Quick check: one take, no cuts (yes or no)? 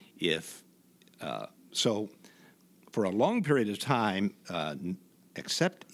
yes